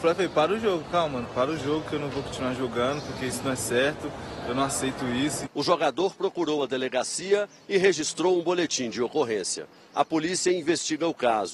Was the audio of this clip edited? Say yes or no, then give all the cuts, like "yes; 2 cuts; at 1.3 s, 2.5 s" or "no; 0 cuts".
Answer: no; 0 cuts